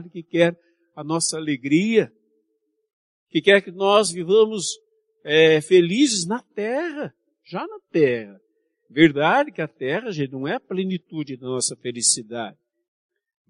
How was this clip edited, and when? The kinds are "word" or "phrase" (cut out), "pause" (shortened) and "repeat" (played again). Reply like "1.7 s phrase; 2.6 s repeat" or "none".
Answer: none